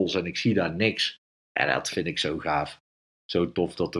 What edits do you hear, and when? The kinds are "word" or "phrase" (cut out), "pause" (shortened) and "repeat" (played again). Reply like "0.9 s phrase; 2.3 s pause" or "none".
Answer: none